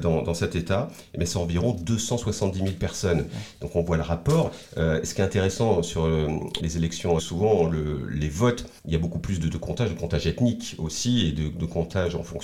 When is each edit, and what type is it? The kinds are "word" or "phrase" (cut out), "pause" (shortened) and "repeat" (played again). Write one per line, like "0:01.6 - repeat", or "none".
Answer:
0:06.6 - word
0:07.2 - phrase
0:08.8 - pause